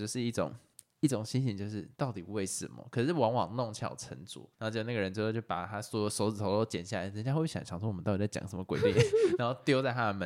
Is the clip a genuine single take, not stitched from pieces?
no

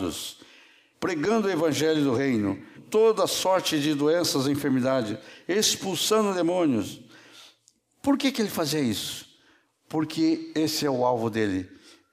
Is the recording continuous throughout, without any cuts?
no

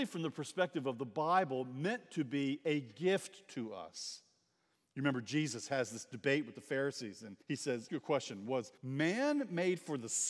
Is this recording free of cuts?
no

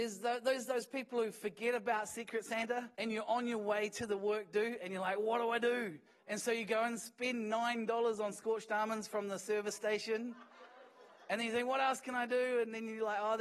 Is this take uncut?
no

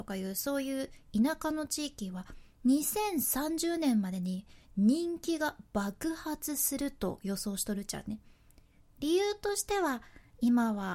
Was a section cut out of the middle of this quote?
no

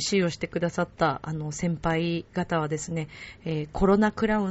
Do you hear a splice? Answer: no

